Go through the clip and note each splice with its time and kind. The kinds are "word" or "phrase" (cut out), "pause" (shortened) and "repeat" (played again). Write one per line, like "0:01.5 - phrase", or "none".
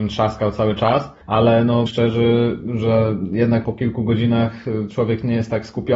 0:01.2 - pause
0:01.9 - word
0:03.6 - word